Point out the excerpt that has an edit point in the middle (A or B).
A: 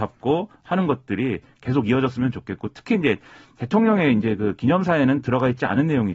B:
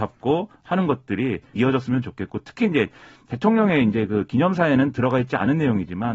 B